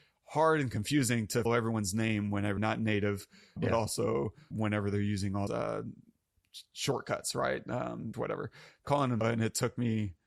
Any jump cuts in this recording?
yes; 8 cuts; at 1.5 s, 2.6 s, 3.6 s, 4.5 s, 5.5 s, 8.1 s, 8.8 s, 9.2 s

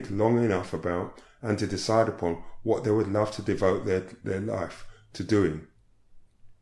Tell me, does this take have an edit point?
no; 0 cuts

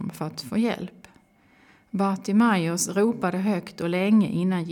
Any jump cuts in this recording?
no; 0 cuts

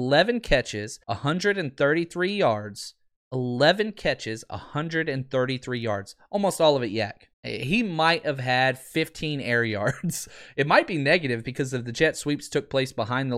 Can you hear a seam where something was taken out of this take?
yes; 3 cuts; at 1.0 s, 3.2 s, 7.3 s

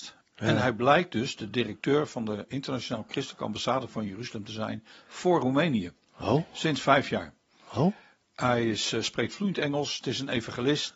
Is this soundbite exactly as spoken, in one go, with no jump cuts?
yes; 0 cuts

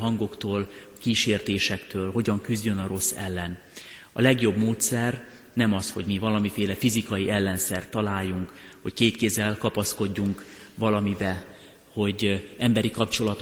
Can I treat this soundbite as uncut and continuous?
yes; 0 cuts

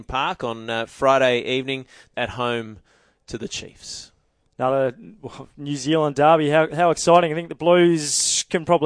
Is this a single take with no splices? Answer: no; 1 cut; at 2.1 s

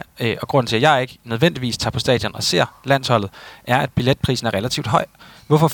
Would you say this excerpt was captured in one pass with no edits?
yes; 0 cuts

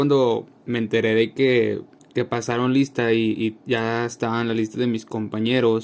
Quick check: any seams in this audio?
no; 0 cuts

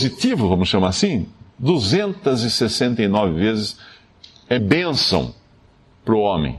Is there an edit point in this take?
yes; 2 cuts; at 1.5 s, 4.6 s

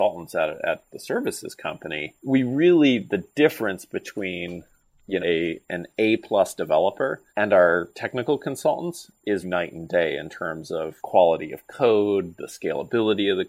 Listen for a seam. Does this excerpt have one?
yes; 5 cuts; at 2.2 s, 5.2 s, 7.3 s, 9.4 s, 11.0 s

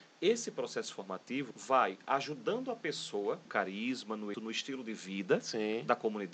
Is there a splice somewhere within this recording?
yes; 3 cuts; at 1.5 s, 3.5 s, 4.3 s

